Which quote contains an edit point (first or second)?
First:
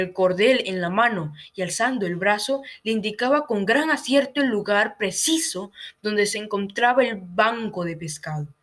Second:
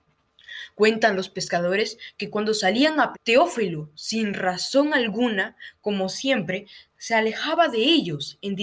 second